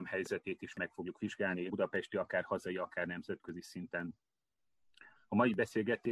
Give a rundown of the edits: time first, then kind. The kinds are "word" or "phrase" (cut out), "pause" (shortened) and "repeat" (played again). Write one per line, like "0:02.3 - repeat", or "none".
0:01.7 - word